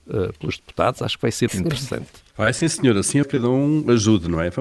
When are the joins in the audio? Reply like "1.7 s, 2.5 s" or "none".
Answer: 1.5 s, 2.3 s, 3.2 s